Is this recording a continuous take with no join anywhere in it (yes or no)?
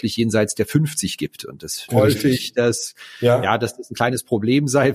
no